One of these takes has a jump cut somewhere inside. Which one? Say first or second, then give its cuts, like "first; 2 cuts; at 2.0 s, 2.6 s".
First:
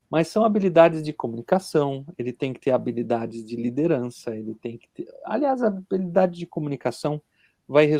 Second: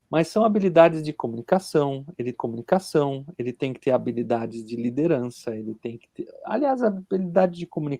second; 1 cut; at 2.3 s